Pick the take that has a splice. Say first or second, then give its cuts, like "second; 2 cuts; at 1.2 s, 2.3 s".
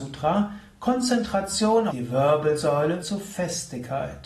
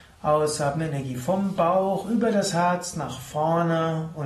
first; 2 cuts; at 1.9 s, 3.0 s